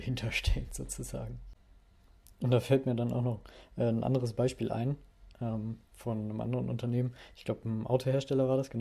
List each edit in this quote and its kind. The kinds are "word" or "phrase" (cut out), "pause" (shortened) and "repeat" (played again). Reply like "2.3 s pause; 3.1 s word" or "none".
none